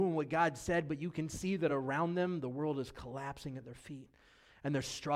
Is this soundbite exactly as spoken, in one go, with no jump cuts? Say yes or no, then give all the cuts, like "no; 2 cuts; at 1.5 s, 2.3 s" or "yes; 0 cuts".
yes; 0 cuts